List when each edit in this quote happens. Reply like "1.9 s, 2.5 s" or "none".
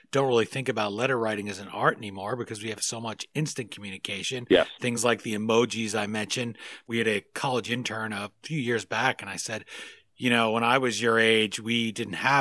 none